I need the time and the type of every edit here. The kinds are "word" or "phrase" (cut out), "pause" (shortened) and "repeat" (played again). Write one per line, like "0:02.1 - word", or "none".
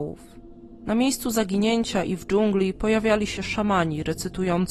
none